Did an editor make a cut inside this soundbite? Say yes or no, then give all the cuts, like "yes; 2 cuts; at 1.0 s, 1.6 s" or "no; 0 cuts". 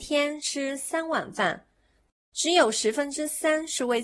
no; 0 cuts